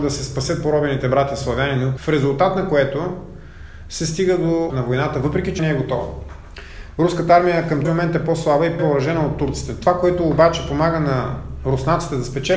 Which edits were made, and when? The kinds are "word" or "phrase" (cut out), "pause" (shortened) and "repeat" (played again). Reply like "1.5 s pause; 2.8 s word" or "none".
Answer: 2.0 s word; 4.7 s word; 5.6 s word; 7.8 s word; 8.8 s word

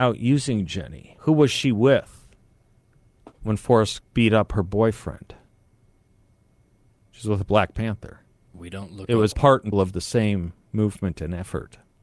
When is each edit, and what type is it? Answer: 1.2 s pause; 3.3 s pause; 4.0 s word; 8.4 s pause; 9.3 s word; 9.7 s word

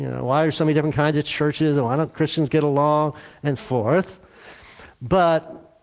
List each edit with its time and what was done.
3.6 s word

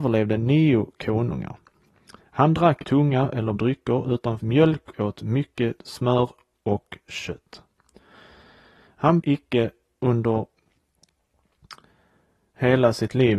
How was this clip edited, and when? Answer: 2.8 s word; 3.6 s word; 4.4 s word; 4.9 s word; 5.8 s word; 9.2 s word

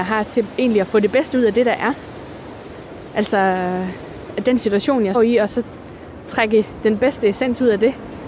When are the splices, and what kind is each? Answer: 5.1 s word

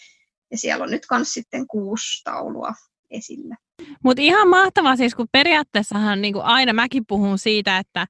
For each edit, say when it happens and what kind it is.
none

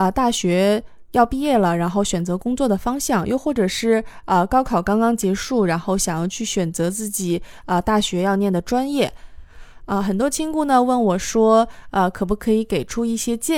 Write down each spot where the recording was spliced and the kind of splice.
none

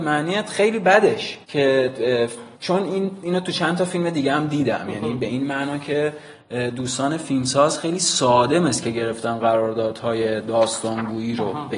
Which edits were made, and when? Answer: 1.4 s pause; 2.5 s pause

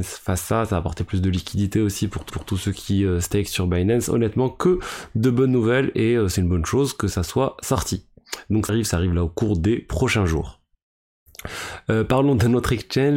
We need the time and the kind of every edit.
2.3 s repeat; 8.7 s word

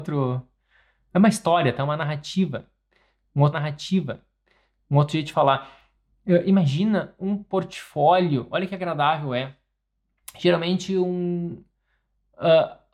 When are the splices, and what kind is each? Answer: 3.5 s repeat

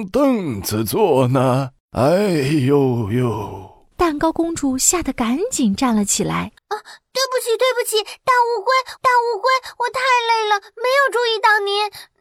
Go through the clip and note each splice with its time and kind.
1.8 s pause; 3.9 s pause; 6.6 s pause; 9.0 s repeat

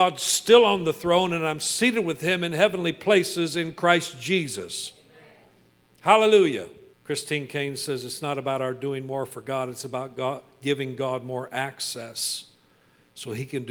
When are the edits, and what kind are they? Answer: 6.9 s pause

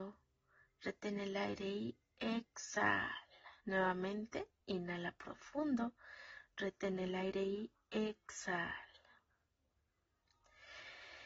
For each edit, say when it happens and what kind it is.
3.6 s pause

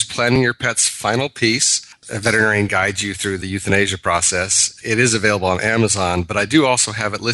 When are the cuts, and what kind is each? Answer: none

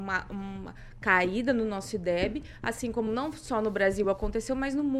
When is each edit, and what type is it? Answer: none

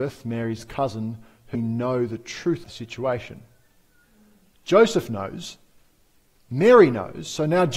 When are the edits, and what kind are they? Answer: 1.5 s word; 2.6 s word

